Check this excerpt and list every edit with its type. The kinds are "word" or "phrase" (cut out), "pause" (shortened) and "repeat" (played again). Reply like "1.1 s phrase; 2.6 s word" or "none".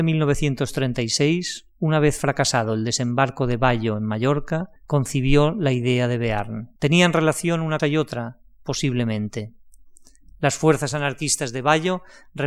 4.8 s pause; 6.8 s pause; 7.8 s word

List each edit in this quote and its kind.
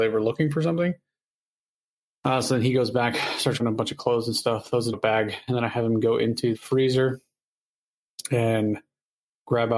3.6 s word; 4.9 s word; 6.5 s word

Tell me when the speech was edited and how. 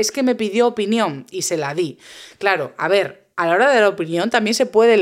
3.3 s pause

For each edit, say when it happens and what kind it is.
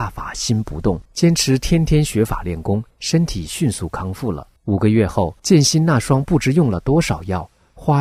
1.1 s pause; 2.9 s pause; 4.6 s pause; 5.4 s pause

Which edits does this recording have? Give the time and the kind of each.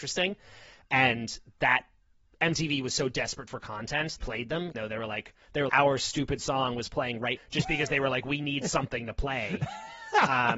4.2 s phrase; 4.7 s word; 5.7 s word; 7.4 s phrase

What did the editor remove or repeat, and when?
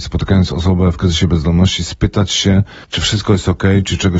2.8 s pause

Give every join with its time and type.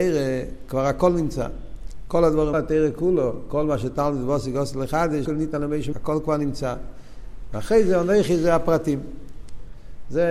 2.5 s phrase; 5.3 s word; 5.9 s word

